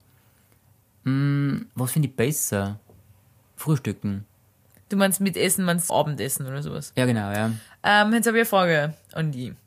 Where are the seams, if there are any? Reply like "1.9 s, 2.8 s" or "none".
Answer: 1.7 s, 5.9 s

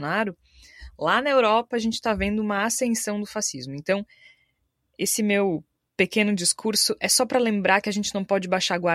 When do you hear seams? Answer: none

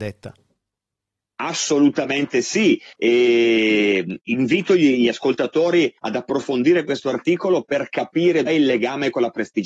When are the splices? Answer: 2.9 s, 6.0 s, 8.5 s

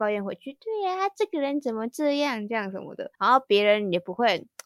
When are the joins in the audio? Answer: 3.1 s

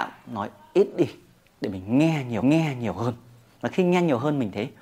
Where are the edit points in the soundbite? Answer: 2.4 s

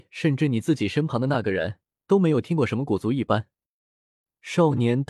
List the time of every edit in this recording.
1.9 s

